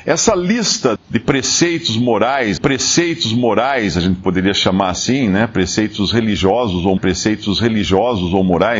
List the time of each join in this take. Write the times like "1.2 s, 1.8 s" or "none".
1.0 s, 2.6 s, 7.0 s